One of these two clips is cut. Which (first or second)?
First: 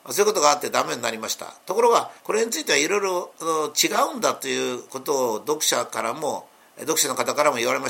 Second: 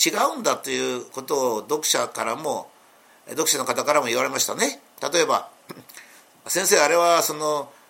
first